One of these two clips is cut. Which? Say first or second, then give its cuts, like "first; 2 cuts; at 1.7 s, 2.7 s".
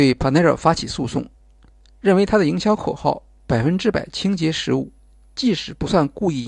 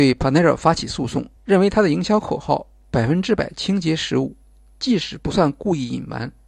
second; 1 cut; at 1.4 s